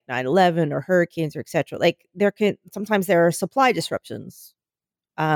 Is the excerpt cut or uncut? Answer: uncut